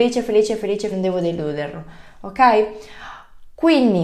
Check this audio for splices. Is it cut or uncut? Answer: cut